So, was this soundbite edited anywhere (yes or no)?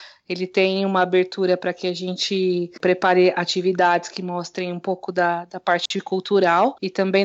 no